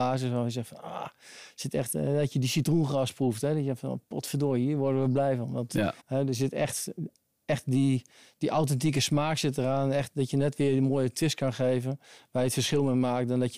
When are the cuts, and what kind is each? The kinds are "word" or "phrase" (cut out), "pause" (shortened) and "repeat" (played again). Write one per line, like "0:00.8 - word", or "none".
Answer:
0:06.0 - pause